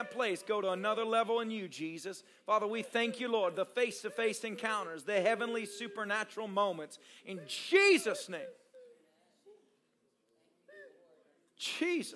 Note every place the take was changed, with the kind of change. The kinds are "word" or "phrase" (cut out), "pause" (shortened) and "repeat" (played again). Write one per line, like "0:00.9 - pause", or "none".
none